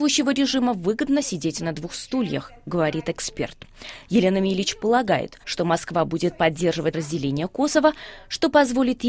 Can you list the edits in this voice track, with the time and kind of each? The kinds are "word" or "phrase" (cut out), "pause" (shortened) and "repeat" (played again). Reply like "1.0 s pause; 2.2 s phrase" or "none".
5.4 s pause; 6.9 s word